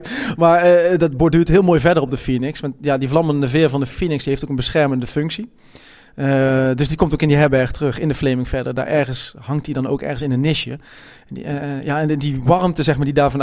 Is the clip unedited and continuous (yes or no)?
yes